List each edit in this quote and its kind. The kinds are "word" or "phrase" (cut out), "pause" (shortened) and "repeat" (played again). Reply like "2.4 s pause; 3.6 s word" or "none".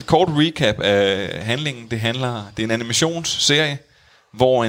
none